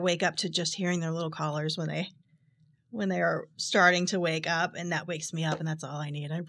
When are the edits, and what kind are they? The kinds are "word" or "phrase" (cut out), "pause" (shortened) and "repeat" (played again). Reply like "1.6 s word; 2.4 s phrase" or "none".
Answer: none

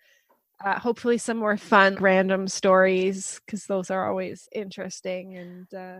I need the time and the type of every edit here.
1.9 s word; 4.5 s word

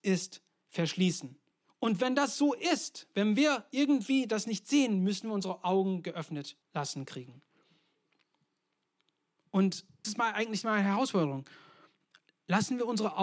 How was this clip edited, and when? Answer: 1.5 s pause; 6.6 s pause; 10.0 s word

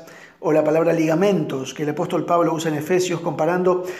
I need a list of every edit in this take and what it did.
none

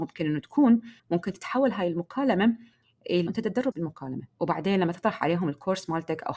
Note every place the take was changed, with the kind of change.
1.0 s pause; 3.3 s word; 3.7 s word; 4.3 s pause

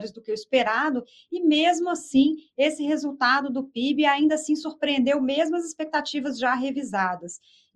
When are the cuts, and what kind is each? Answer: none

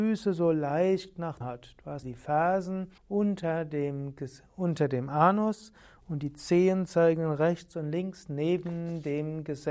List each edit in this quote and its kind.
1.4 s word; 2.0 s word; 3.0 s pause

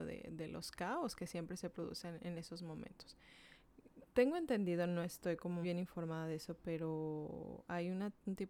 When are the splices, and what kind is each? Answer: 5.6 s word

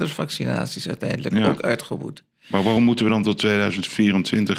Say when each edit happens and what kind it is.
none

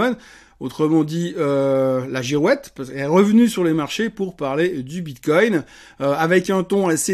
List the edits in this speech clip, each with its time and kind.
none

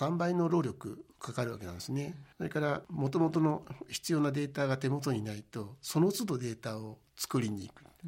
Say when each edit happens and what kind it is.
2.3 s pause

